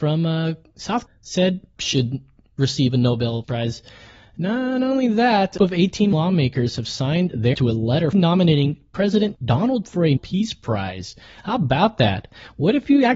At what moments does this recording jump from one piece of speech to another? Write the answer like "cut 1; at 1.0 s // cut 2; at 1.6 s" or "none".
cut 1; at 1.1 s // cut 2; at 1.8 s // cut 3; at 3.4 s // cut 4; at 5.6 s // cut 5; at 6.1 s // cut 6; at 7.5 s // cut 7; at 8.1 s // cut 8; at 9.8 s // cut 9; at 10.2 s